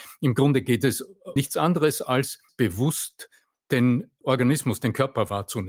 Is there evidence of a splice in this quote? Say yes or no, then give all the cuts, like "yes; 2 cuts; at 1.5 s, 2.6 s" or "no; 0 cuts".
yes; 3 cuts; at 1.4 s, 2.5 s, 4.2 s